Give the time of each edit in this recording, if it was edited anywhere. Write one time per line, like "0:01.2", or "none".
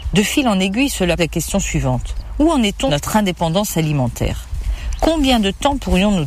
0:01.2
0:02.9